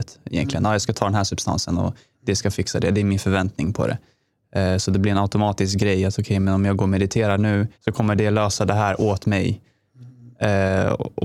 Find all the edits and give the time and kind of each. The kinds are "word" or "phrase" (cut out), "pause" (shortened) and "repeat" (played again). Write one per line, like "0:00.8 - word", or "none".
0:07.7 - pause